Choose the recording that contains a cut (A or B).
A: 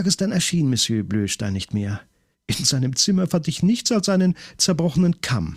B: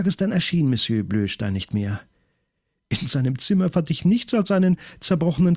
A